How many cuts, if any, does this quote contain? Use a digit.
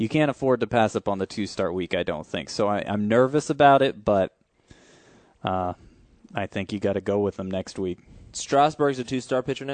0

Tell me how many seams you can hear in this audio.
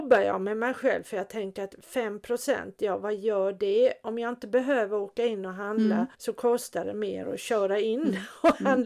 1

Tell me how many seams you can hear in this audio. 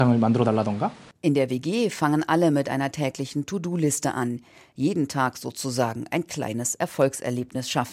0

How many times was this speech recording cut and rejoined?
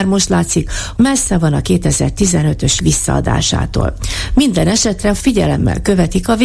3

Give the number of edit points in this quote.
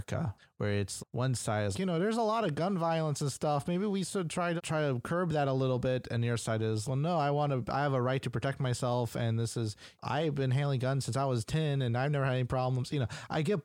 4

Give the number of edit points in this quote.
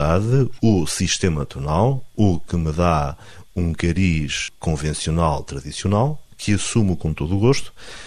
2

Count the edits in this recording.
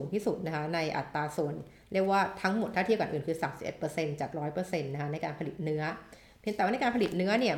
0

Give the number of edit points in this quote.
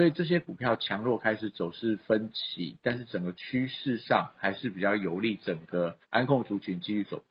1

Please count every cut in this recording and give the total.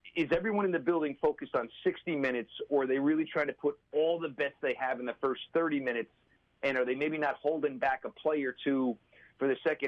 0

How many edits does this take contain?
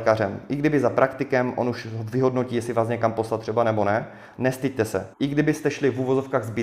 1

